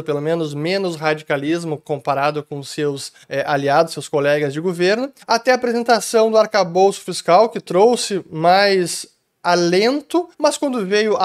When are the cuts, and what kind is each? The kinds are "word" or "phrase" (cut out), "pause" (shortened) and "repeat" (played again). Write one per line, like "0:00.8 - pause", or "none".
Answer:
0:03.2 - pause
0:05.2 - pause
0:10.3 - pause